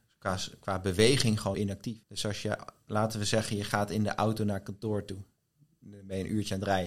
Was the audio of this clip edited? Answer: yes; 2 cuts; at 1.5 s, 2.0 s

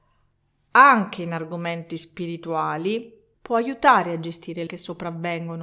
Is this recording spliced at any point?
yes; 2 cuts; at 3.3 s, 4.7 s

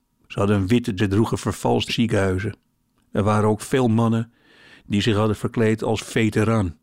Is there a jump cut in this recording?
yes; 2 cuts; at 1.0 s, 1.9 s

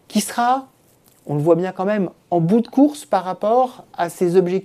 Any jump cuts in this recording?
no; 0 cuts

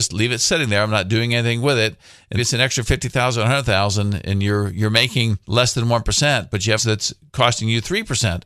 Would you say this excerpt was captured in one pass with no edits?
no; 3 cuts; at 2.4 s, 5.4 s, 6.8 s

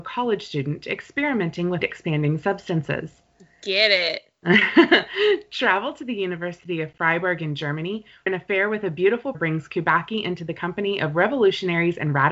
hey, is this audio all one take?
no; 3 cuts; at 1.8 s, 8.3 s, 9.3 s

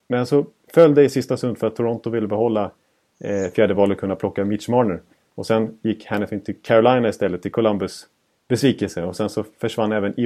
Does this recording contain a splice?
no; 0 cuts

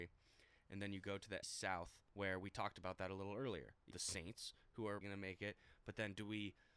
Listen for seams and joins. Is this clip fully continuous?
no; 4 cuts; at 1.4 s, 2.1 s, 3.9 s, 5.0 s

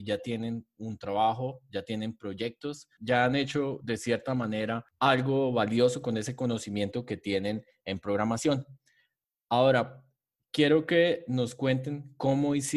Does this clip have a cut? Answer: no; 0 cuts

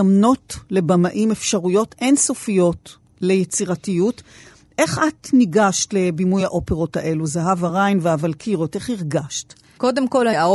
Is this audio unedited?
yes; 0 cuts

